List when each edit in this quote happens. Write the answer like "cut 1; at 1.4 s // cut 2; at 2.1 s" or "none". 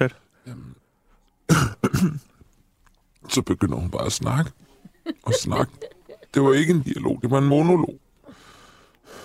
cut 1; at 6.2 s